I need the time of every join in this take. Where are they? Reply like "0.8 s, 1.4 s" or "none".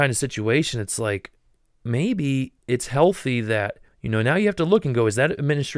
2.6 s, 3.9 s